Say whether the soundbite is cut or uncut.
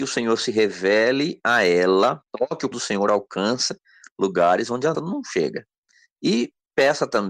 cut